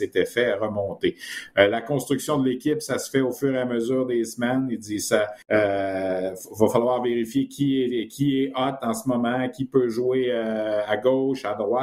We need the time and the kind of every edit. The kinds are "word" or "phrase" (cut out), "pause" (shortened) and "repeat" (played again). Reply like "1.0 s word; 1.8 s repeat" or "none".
5.4 s pause